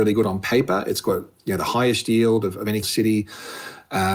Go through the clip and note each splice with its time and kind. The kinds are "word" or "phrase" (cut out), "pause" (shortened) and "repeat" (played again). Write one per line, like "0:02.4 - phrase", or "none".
0:02.8 - word